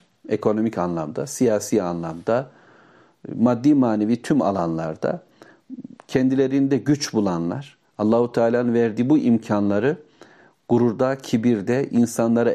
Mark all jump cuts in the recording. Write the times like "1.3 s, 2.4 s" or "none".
none